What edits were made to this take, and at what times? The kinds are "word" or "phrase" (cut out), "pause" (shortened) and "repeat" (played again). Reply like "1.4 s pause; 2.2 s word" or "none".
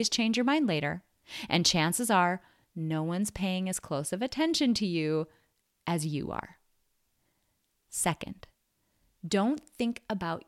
none